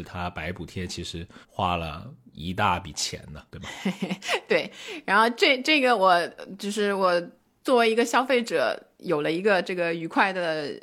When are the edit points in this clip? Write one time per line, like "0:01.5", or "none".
0:01.4
0:03.5